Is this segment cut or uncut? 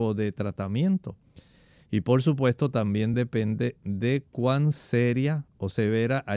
uncut